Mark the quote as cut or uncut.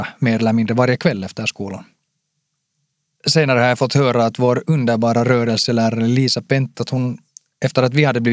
cut